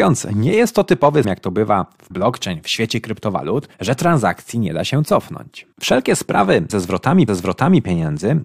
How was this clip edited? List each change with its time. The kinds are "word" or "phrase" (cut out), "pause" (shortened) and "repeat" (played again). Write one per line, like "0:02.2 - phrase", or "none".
0:01.2 - word
0:02.1 - word
0:03.7 - pause
0:05.7 - pause
0:06.7 - word
0:07.3 - repeat